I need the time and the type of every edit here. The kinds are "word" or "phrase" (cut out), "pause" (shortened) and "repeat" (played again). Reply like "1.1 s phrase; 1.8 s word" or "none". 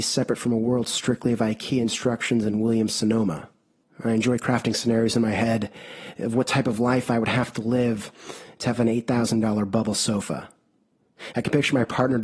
3.8 s pause